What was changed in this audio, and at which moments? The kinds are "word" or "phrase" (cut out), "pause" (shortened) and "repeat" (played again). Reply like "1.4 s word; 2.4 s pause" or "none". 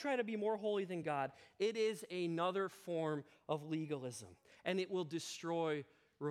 none